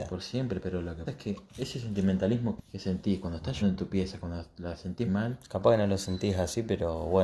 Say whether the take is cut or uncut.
cut